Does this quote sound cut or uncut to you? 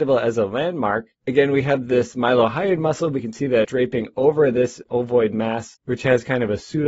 cut